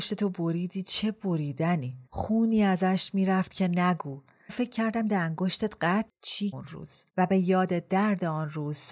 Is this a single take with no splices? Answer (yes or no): no